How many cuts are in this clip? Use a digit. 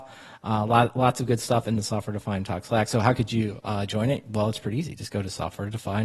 0